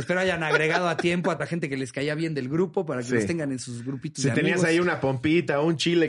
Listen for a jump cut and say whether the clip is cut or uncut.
cut